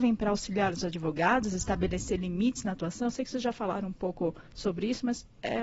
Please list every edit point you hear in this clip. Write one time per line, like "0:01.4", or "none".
0:04.5